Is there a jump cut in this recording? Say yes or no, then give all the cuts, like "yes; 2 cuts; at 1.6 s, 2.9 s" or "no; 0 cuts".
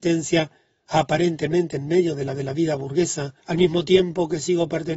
yes; 2 cuts; at 2.3 s, 3.4 s